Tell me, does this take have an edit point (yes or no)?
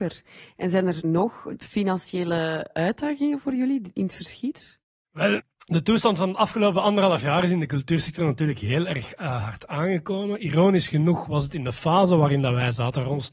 no